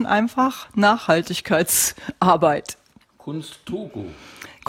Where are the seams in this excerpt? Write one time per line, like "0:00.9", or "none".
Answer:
none